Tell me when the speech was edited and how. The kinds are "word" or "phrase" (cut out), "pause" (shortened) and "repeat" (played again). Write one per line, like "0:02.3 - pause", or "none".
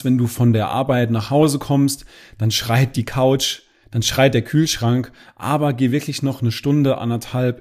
none